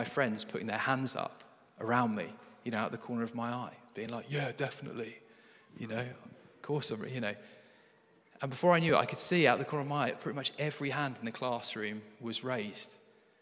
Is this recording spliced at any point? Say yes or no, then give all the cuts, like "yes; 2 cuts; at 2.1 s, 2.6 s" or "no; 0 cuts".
no; 0 cuts